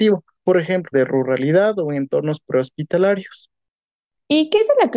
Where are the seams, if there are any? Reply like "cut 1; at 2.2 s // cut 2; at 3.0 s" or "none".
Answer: cut 1; at 0.9 s